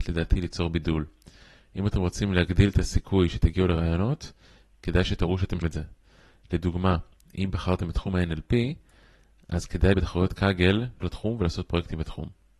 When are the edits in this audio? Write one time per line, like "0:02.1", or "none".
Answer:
0:05.6
0:09.9
0:11.0

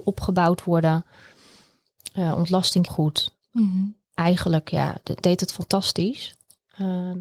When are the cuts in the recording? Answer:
0:02.9
0:05.2

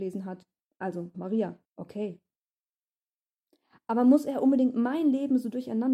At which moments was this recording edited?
0:01.1
0:01.6

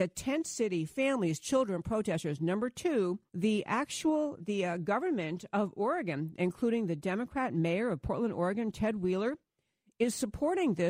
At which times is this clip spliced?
0:03.3
0:04.4

